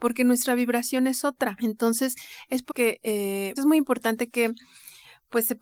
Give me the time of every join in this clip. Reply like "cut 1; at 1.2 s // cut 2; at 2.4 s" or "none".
cut 1; at 2.7 s // cut 2; at 3.6 s